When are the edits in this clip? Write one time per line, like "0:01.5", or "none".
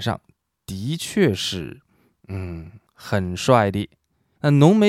none